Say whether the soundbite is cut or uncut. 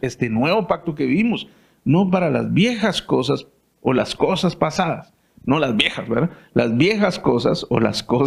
uncut